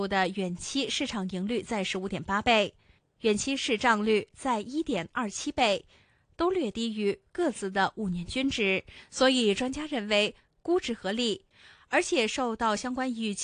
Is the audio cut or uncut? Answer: uncut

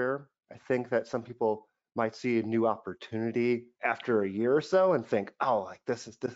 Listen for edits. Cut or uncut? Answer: uncut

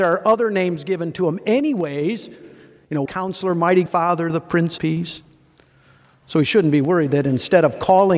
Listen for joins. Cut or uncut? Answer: cut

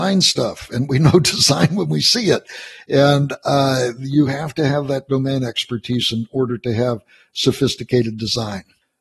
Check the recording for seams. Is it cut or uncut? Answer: uncut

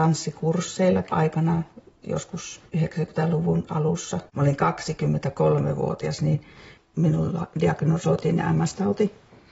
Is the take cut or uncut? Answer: cut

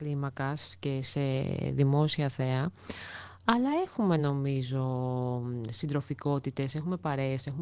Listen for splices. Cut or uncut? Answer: uncut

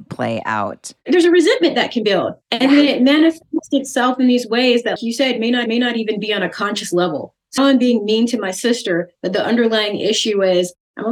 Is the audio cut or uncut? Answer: cut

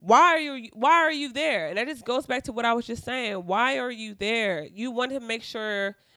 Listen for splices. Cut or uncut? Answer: uncut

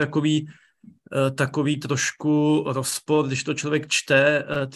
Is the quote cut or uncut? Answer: uncut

